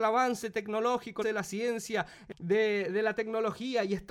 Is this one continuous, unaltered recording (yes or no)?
no